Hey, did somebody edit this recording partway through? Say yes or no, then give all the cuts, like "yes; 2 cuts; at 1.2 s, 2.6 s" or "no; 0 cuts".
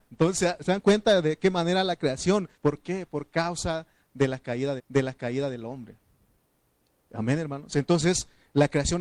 yes; 2 cuts; at 2.5 s, 4.8 s